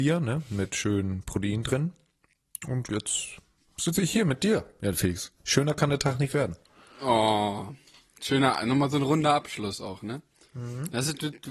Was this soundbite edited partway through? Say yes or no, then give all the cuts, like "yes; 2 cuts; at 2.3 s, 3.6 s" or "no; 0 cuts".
no; 0 cuts